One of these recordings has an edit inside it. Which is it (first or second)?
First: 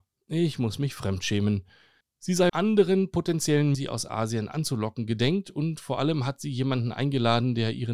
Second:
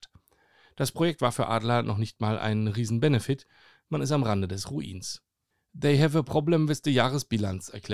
first